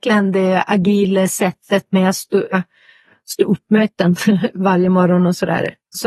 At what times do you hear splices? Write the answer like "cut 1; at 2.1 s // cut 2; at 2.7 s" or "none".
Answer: none